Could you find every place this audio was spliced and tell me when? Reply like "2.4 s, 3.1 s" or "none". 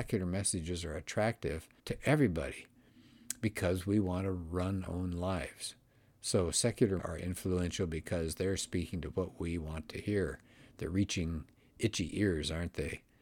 1.8 s, 4.9 s, 7.0 s

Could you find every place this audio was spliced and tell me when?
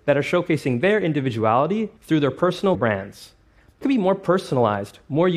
2.0 s, 2.7 s, 3.8 s

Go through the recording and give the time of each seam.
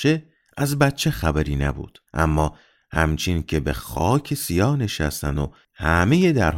2.1 s

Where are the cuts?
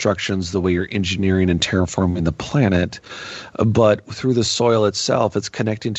none

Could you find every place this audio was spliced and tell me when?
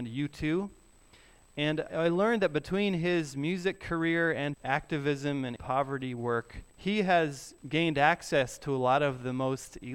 1.9 s, 4.5 s, 5.6 s, 6.7 s, 7.6 s

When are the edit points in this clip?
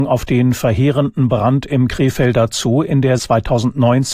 3.2 s

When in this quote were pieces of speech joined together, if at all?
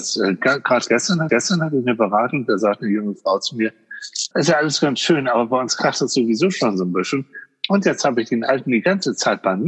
1.3 s, 4.3 s

